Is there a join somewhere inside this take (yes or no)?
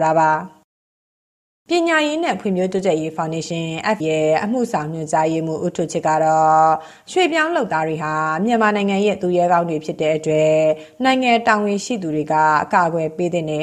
yes